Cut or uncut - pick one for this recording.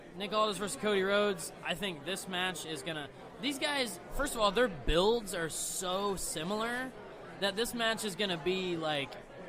uncut